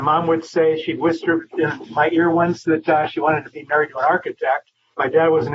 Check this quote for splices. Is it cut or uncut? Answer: uncut